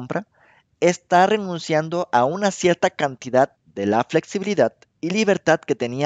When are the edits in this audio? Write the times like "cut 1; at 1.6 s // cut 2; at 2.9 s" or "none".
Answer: cut 1; at 3.6 s